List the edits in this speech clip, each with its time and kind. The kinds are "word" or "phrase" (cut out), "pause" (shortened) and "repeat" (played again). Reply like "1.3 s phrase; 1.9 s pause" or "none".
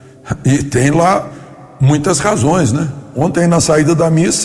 none